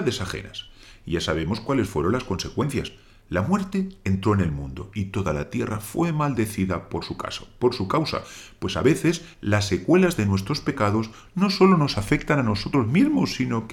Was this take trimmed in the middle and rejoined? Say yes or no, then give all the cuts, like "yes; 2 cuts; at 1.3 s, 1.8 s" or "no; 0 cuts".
no; 0 cuts